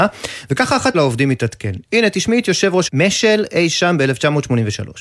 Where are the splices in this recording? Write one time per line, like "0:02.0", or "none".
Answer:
0:00.9
0:02.9